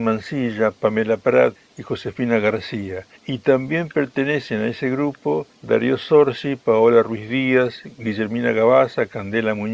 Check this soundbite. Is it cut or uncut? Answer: uncut